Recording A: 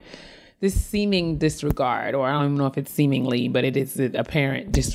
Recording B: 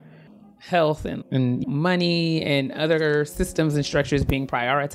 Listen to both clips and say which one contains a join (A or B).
B